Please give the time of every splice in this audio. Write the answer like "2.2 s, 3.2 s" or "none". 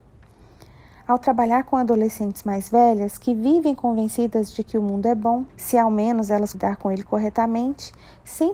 5.5 s, 6.5 s